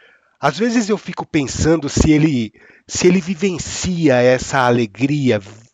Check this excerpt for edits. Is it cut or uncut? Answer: uncut